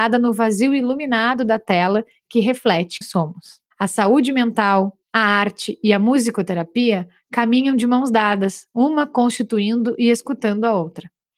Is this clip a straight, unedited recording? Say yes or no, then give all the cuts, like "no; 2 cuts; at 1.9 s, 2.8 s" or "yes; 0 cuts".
no; 3 cuts; at 3.0 s, 3.7 s, 5.0 s